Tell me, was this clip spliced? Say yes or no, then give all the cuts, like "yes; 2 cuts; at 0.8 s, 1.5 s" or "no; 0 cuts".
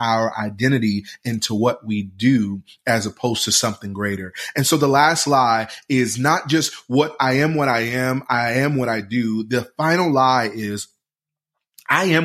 no; 0 cuts